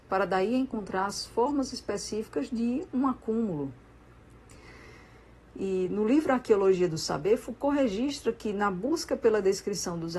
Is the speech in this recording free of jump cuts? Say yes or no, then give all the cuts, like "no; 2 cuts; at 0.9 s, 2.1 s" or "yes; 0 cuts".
yes; 0 cuts